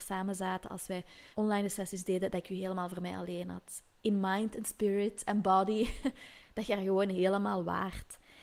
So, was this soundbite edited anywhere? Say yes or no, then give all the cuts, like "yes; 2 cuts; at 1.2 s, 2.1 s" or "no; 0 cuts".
yes; 1 cut; at 1.3 s